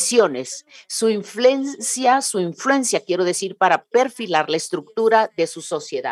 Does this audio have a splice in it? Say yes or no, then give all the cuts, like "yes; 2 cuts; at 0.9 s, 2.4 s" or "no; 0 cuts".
no; 0 cuts